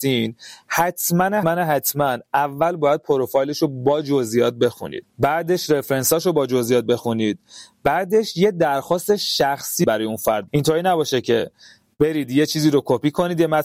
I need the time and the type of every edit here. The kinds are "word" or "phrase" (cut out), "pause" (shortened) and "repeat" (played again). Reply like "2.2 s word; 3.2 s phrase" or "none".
1.4 s word; 10.5 s word